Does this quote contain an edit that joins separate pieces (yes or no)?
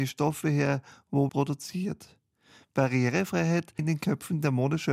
yes